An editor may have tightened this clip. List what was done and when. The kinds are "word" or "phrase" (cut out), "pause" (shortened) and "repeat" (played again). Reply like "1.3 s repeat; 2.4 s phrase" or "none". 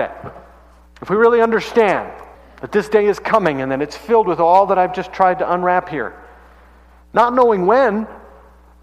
2.3 s pause